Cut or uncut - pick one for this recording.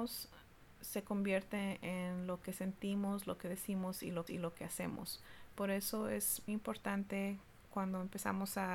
cut